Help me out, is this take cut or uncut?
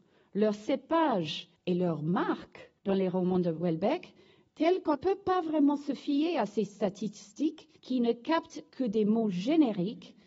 cut